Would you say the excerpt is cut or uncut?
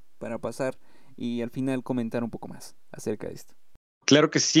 uncut